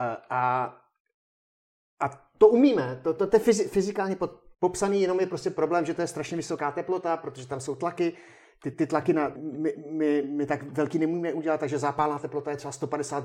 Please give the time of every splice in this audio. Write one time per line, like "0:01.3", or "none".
0:04.5
0:08.7
0:09.4
0:10.2